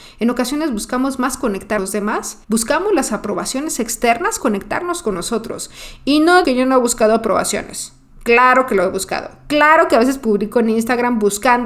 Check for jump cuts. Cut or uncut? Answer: cut